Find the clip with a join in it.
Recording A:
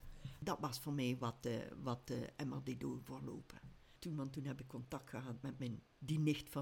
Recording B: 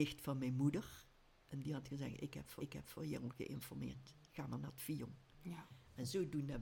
B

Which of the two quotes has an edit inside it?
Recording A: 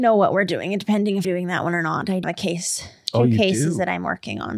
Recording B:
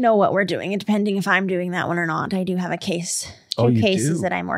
A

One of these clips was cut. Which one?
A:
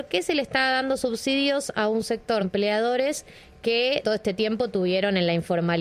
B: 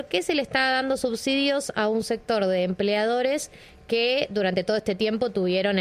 A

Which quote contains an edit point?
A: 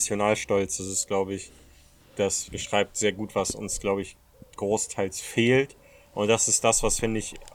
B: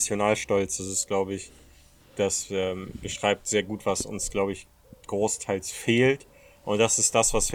A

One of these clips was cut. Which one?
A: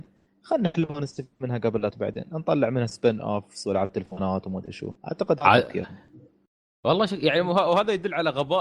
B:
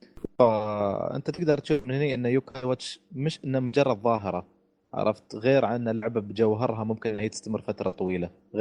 A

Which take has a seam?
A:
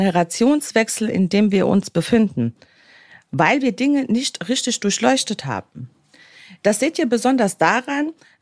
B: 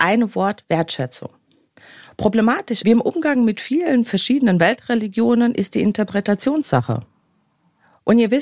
B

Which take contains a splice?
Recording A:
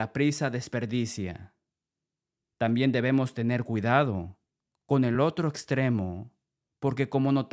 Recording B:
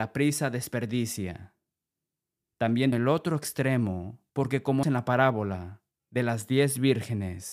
B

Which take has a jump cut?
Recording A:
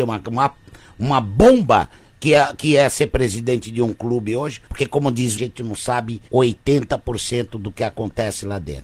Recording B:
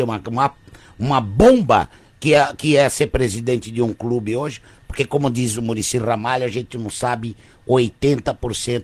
A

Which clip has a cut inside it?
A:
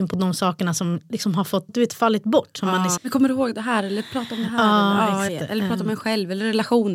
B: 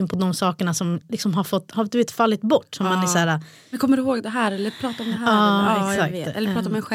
A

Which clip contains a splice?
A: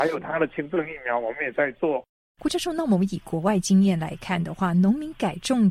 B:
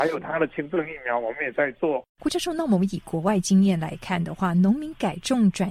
B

